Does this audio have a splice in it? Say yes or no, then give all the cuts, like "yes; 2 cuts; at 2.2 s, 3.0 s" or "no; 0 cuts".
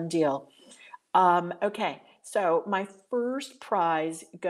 no; 0 cuts